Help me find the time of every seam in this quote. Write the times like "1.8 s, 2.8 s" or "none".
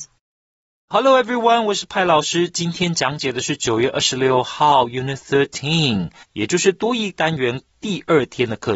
6.2 s